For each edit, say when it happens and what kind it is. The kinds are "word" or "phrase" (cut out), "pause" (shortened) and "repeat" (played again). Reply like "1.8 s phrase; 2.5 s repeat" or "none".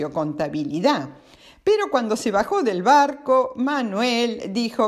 none